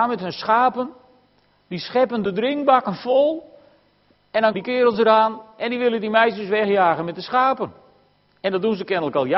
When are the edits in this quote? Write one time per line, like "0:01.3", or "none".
0:04.5